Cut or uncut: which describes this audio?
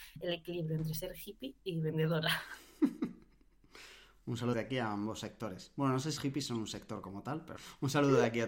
cut